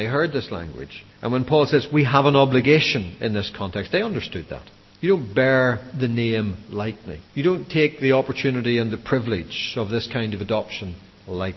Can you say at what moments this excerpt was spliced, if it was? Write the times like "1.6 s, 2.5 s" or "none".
1.1 s, 4.9 s, 7.3 s